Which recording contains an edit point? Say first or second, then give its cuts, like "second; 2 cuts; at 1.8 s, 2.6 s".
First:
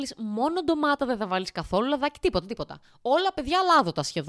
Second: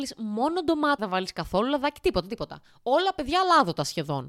second; 1 cut; at 1.0 s